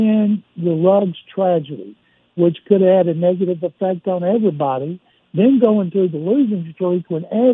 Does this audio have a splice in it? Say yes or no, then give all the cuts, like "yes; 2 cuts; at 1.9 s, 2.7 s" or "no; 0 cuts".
no; 0 cuts